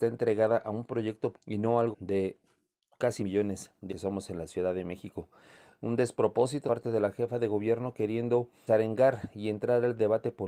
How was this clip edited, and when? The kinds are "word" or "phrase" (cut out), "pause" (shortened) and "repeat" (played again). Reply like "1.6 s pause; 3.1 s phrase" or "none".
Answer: 1.3 s word; 1.9 s word; 3.2 s word; 3.9 s word; 6.7 s word; 8.7 s word